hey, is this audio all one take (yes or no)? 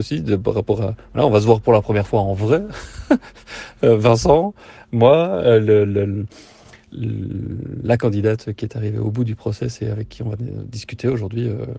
yes